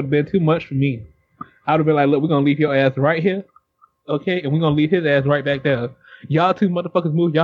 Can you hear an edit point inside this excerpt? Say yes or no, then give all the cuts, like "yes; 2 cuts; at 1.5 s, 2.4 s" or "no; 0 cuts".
no; 0 cuts